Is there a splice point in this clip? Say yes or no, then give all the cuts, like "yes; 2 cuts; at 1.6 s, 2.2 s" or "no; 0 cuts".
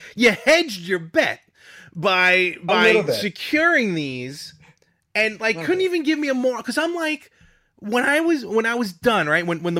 no; 0 cuts